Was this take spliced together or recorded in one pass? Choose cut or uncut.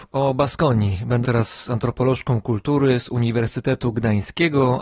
cut